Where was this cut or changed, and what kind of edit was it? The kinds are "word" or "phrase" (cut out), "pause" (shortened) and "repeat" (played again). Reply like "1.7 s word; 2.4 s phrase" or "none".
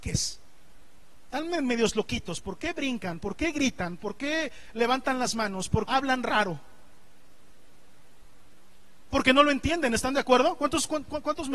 5.9 s word